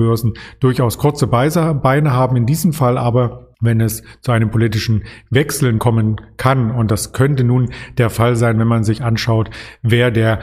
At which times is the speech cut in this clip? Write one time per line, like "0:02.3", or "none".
0:03.5
0:05.8